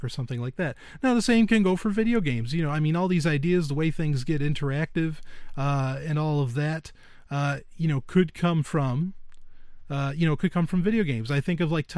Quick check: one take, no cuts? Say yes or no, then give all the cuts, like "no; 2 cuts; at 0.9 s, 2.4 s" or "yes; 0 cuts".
yes; 0 cuts